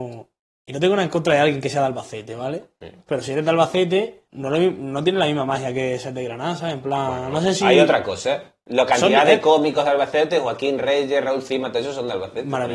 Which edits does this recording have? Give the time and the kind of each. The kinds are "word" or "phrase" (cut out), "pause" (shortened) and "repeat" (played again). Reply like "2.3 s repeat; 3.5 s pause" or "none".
4.3 s pause